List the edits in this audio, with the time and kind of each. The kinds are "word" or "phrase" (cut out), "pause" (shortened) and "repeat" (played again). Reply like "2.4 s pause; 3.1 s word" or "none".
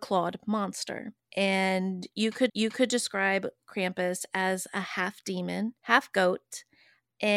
2.5 s repeat; 5.8 s pause

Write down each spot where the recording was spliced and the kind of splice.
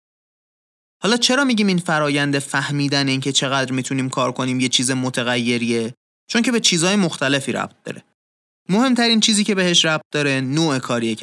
none

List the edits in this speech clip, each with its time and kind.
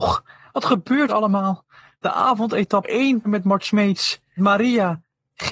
1.1 s word; 2.8 s word; 3.2 s word; 4.4 s word

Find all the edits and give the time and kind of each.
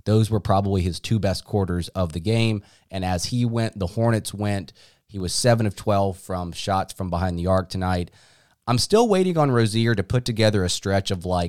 none

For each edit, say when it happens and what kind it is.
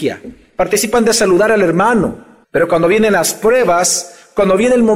2.4 s pause

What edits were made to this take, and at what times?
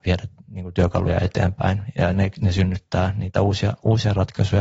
none

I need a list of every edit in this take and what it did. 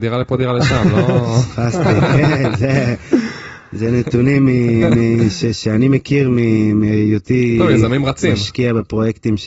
none

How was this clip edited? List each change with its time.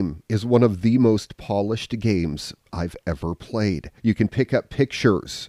4.0 s pause

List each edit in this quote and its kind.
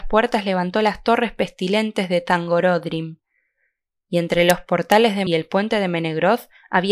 5.3 s phrase

